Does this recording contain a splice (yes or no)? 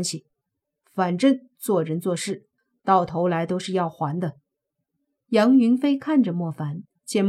yes